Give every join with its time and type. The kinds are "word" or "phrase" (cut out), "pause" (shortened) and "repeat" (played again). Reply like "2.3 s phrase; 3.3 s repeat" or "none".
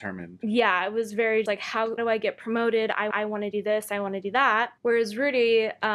1.5 s word; 2.0 s word; 3.1 s repeat; 4.8 s pause